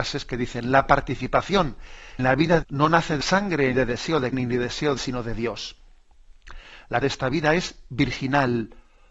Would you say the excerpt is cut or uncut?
cut